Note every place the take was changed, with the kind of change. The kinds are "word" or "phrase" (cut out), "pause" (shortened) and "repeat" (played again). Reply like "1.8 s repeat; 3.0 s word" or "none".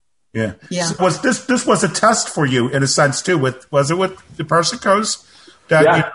1.0 s word